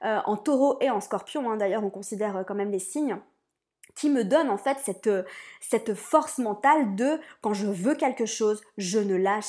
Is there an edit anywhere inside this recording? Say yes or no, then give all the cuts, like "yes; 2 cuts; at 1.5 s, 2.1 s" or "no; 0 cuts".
no; 0 cuts